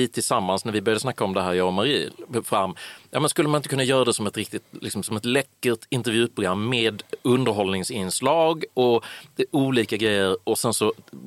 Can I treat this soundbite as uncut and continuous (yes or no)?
yes